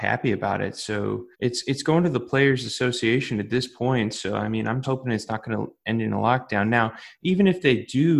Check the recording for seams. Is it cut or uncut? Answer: cut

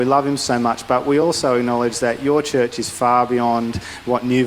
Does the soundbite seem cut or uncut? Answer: uncut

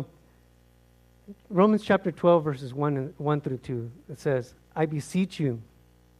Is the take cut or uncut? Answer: uncut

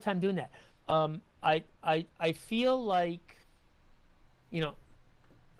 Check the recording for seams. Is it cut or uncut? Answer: uncut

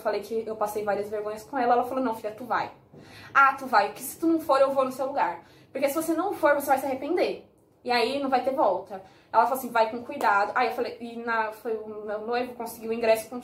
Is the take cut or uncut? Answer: uncut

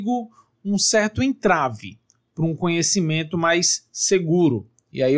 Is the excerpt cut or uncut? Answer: uncut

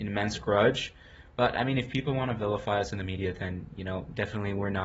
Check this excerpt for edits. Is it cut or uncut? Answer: uncut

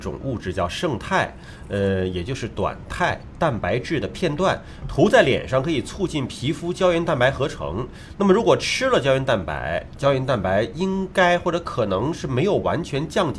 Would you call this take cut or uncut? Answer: uncut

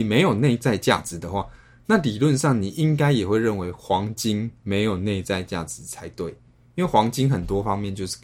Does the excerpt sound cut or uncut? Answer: uncut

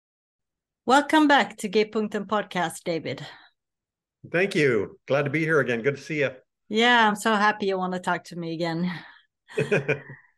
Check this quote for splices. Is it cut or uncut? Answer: uncut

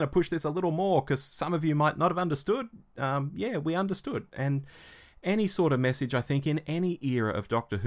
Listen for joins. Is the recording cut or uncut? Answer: uncut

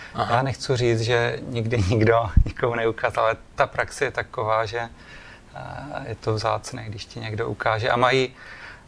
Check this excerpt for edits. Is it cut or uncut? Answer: uncut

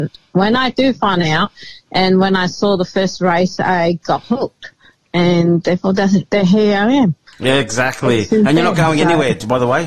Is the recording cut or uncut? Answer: uncut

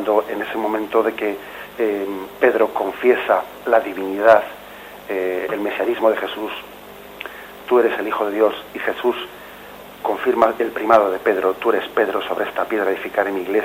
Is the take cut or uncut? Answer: uncut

